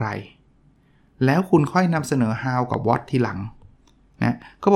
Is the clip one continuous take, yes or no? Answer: yes